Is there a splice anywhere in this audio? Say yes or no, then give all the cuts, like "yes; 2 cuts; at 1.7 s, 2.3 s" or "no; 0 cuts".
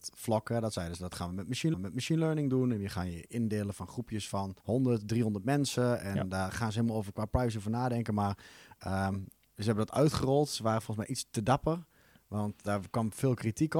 yes; 2 cuts; at 1.7 s, 4.6 s